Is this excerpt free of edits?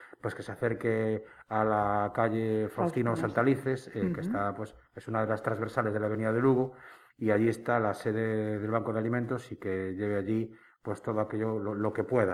yes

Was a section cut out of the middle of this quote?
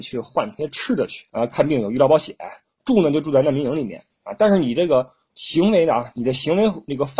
yes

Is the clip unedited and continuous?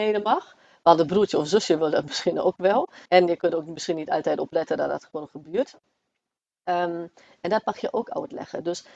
no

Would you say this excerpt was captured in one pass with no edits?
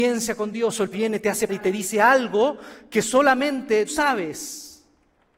no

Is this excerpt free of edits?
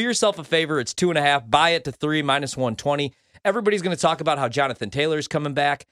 yes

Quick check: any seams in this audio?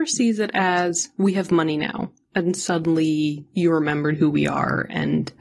no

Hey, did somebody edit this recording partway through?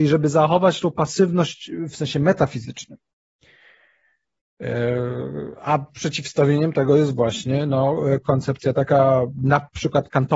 no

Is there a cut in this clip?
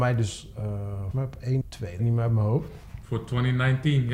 yes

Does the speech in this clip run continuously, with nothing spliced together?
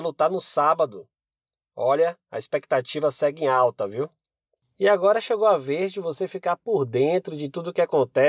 yes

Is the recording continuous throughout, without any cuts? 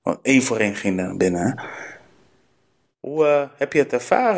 yes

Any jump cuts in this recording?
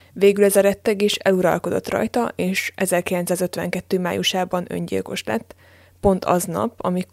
no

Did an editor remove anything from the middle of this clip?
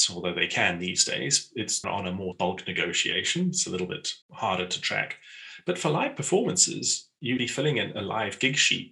yes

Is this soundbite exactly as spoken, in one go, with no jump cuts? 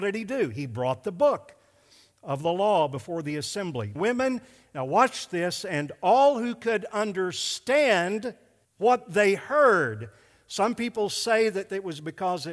no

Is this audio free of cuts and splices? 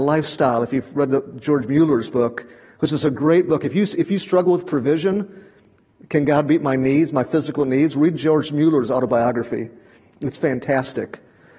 yes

